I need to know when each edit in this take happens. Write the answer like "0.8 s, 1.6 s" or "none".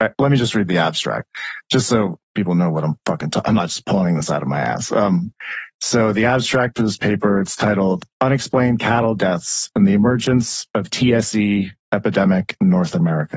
none

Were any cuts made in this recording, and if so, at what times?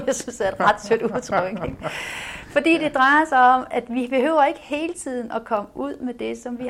none

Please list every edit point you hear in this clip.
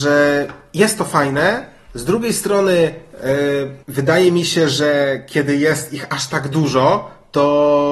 1.8 s, 3.8 s

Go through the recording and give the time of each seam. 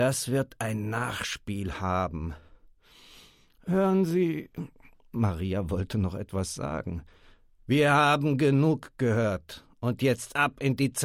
none

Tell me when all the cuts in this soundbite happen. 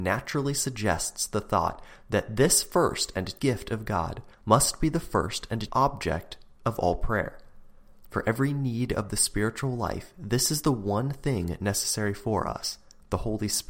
3.4 s, 4.3 s, 5.7 s

